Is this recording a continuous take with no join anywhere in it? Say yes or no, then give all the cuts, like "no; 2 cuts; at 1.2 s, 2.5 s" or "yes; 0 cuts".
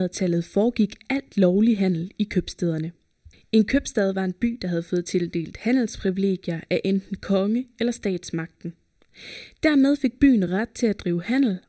yes; 0 cuts